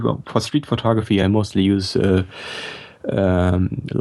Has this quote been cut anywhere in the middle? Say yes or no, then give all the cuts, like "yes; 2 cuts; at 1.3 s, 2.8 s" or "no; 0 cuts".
no; 0 cuts